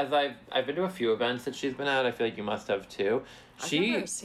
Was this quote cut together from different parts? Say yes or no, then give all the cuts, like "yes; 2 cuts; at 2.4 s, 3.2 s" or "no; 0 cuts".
no; 0 cuts